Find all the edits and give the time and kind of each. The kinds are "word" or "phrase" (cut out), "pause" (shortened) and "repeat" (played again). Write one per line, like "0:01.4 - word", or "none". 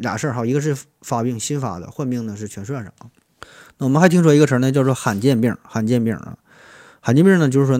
0:03.4 - pause